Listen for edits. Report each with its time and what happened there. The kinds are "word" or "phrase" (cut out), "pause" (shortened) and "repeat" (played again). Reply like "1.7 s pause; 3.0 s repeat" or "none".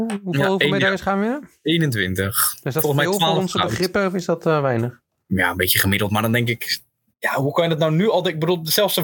none

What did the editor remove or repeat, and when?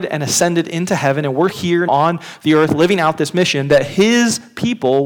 1.5 s word; 1.9 s word

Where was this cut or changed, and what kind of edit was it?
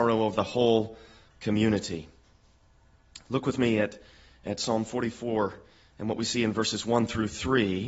none

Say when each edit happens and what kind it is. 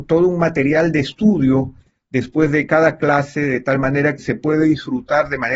4.2 s word

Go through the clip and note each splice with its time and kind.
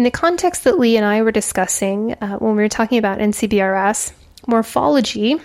none

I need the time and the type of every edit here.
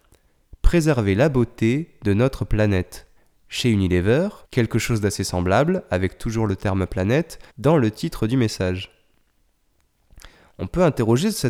3.2 s pause; 4.4 s pause; 7.5 s pause

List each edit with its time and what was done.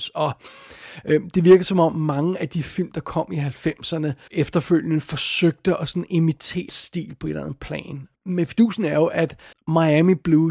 4.3 s word; 6.7 s word; 8.1 s pause; 9.5 s pause

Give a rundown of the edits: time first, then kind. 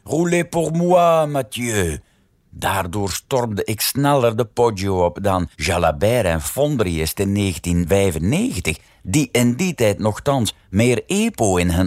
none

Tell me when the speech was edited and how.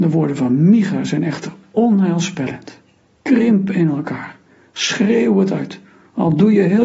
none

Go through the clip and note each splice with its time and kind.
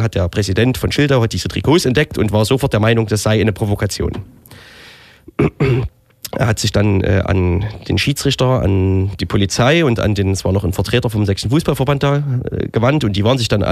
none

